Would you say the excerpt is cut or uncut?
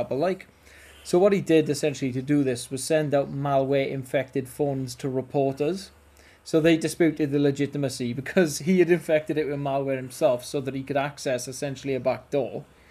uncut